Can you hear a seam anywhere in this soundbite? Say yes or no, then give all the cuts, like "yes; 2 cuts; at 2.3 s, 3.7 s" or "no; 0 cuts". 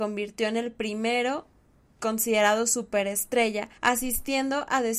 yes; 2 cuts; at 2.0 s, 3.8 s